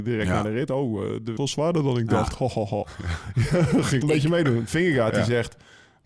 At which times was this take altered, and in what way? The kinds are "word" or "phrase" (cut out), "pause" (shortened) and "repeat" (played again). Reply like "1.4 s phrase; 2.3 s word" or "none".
1.4 s word; 4.0 s phrase

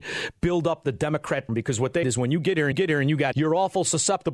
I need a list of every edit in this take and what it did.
1.5 s word; 2.0 s word; 2.7 s repeat; 3.3 s word

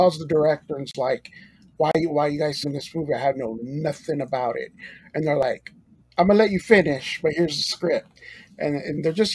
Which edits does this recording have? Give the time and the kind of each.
2.6 s phrase; 6.0 s pause

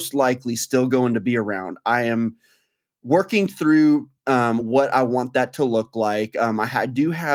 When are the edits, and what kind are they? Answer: none

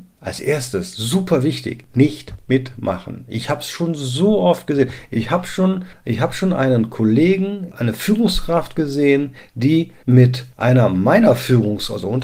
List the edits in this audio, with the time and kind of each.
none

